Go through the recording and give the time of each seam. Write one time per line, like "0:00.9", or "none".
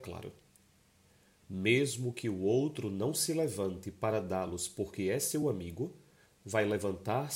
none